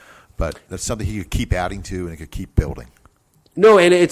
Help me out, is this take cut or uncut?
uncut